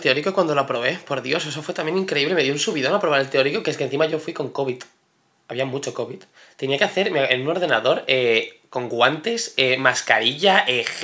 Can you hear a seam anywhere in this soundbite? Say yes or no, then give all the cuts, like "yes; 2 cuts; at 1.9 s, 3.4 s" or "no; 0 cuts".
no; 0 cuts